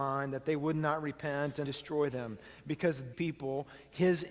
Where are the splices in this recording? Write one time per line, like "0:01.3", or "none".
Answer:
0:01.6
0:03.1

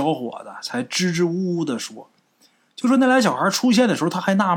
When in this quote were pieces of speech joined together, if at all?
none

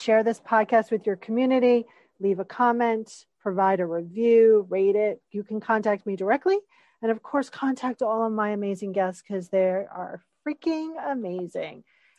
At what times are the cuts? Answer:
0:03.3

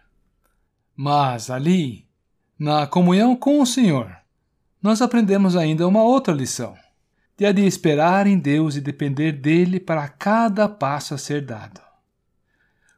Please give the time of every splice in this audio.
none

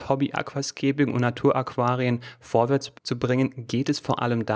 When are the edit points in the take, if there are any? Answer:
0:03.0

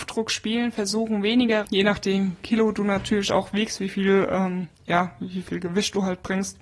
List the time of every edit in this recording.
0:01.6
0:02.4
0:04.8

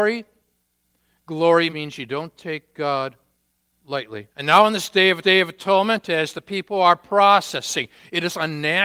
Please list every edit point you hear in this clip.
0:01.7
0:04.3
0:05.2

